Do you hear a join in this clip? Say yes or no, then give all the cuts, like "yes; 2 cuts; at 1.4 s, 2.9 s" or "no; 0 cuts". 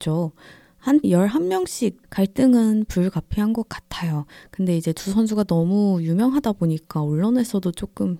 yes; 2 cuts; at 1.0 s, 2.0 s